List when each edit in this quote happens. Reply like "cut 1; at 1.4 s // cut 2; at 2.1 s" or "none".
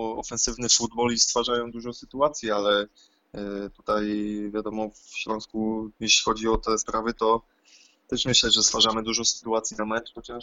cut 1; at 1.7 s

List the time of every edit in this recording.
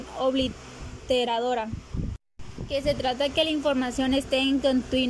none

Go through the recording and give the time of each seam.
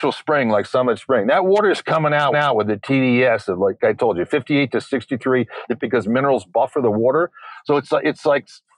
cut 1; at 2.3 s // cut 2; at 3.8 s // cut 3; at 5.8 s

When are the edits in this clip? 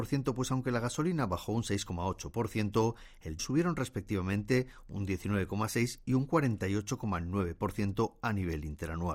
cut 1; at 3.4 s

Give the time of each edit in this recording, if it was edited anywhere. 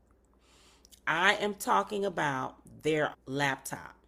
cut 1; at 3.1 s

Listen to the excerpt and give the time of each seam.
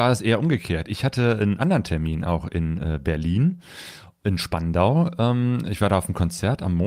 none

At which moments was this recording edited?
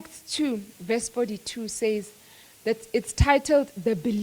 none

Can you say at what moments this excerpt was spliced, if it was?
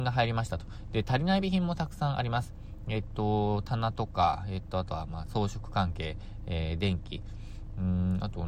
none

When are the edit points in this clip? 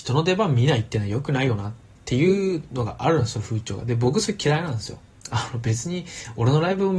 none

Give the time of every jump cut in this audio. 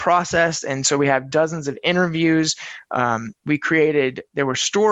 none

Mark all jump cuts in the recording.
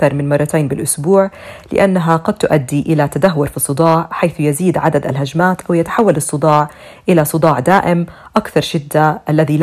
none

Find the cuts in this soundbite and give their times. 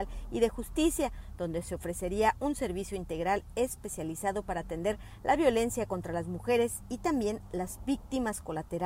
none

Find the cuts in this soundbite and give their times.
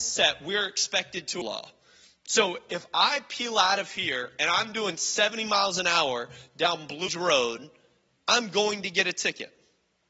cut 1; at 1.4 s // cut 2; at 7.1 s

